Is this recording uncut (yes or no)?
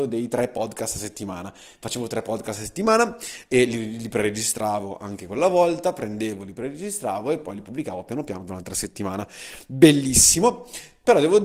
yes